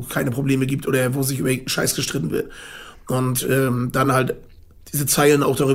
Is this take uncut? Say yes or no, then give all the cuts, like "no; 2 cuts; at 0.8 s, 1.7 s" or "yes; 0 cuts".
yes; 0 cuts